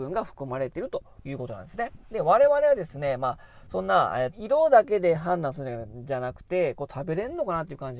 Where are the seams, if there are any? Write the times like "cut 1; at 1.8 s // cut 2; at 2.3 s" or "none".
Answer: cut 1; at 4.3 s